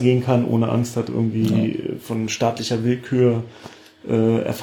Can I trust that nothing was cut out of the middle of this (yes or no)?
yes